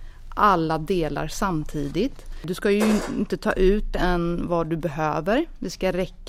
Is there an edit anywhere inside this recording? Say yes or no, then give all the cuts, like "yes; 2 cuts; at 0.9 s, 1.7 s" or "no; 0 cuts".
yes; 1 cut; at 3.9 s